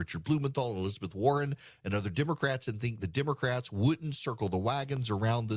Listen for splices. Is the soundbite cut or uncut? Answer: uncut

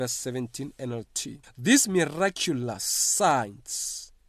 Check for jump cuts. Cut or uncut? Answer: cut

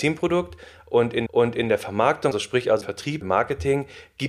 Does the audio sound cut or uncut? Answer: cut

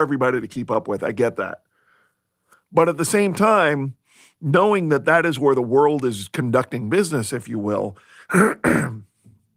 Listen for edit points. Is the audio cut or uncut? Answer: uncut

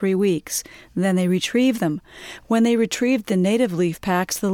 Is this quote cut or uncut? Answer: uncut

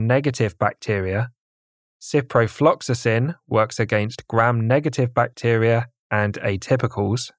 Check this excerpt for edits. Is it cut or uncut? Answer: uncut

